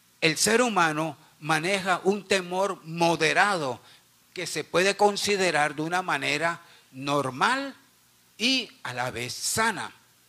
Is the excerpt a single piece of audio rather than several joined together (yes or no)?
yes